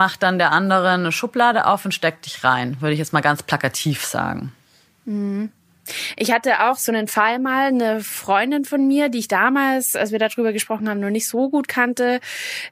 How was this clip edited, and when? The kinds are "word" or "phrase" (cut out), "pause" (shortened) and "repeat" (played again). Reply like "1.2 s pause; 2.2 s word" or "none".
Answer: none